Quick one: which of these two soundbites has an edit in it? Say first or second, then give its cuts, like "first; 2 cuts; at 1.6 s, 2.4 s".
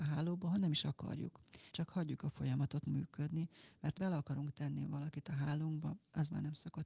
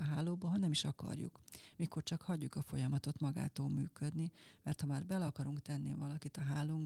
first; 3 cuts; at 1.7 s, 2.9 s, 4.0 s